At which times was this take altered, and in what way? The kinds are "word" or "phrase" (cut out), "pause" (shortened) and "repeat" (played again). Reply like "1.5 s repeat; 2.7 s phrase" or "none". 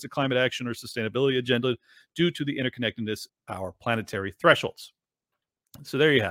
3.3 s word